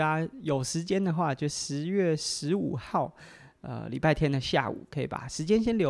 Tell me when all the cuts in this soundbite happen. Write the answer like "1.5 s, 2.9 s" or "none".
none

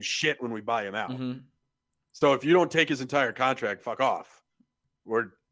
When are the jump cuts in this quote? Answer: none

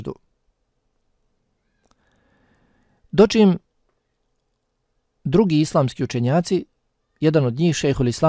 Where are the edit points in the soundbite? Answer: none

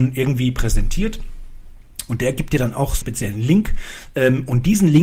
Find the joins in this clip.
3.0 s

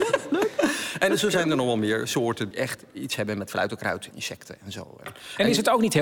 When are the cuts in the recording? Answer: 2.5 s, 4.1 s

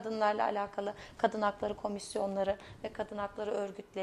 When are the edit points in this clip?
none

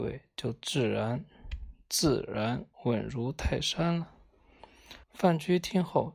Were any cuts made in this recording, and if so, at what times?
2.7 s, 5.0 s

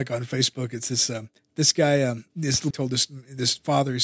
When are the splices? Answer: 1.4 s, 2.3 s, 2.7 s

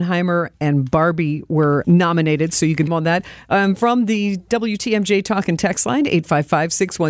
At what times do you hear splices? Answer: 1.8 s, 2.9 s

